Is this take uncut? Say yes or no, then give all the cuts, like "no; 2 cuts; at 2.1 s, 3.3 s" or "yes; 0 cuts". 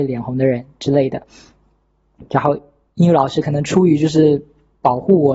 yes; 0 cuts